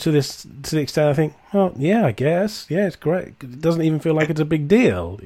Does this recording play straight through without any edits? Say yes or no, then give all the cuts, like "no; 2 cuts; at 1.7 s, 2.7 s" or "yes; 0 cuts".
yes; 0 cuts